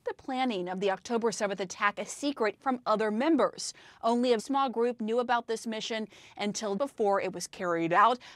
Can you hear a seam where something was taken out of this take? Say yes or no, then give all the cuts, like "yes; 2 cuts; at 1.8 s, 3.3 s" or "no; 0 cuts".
yes; 3 cuts; at 2.6 s, 4.4 s, 6.8 s